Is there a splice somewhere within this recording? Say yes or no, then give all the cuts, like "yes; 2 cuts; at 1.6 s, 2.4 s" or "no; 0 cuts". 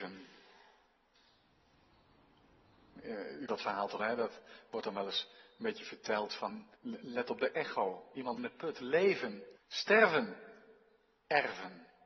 yes; 5 cuts; at 3.5 s, 4.0 s, 6.7 s, 8.4 s, 9.6 s